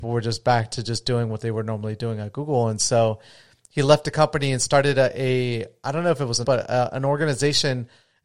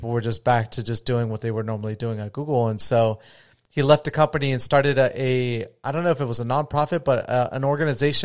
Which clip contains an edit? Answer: first; 1 cut; at 6.4 s

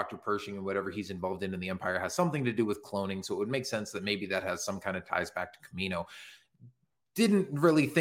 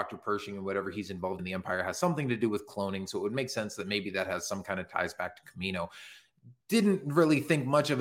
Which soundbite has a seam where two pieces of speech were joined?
second; 2 cuts; at 1.4 s, 6.6 s

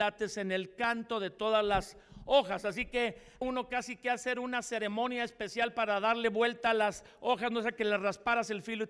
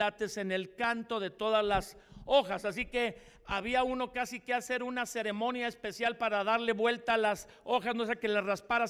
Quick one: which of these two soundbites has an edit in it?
first; 1 cut; at 3.4 s

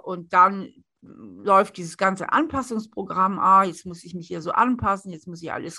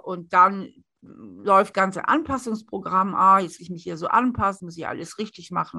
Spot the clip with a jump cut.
second; 3 cuts; at 1.7 s, 3.6 s, 4.6 s

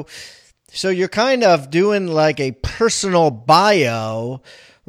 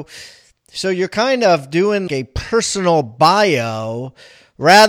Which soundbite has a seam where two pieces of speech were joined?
second; 1 cut; at 2.1 s

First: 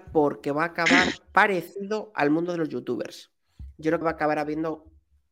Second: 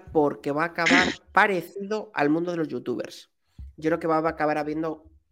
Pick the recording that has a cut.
first; 1 cut; at 4.0 s

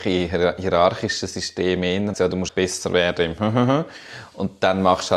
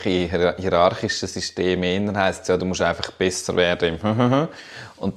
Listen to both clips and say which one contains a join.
first; 2 cuts; at 2.1 s, 2.5 s

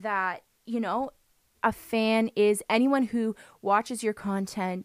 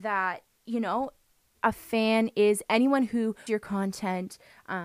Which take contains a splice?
second; 1 cut; at 3.5 s

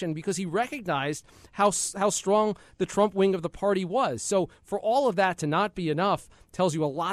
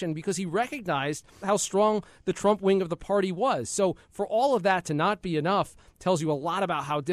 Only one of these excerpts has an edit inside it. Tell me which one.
second; 1 cut; at 1.4 s

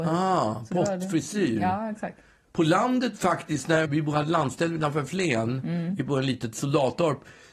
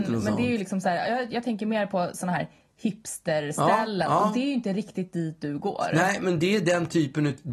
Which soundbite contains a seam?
first; 1 cut; at 3.8 s

